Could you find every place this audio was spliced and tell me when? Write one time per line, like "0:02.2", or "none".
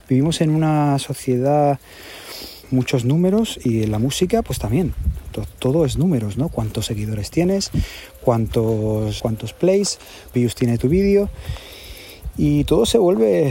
0:02.6
0:09.2
0:10.3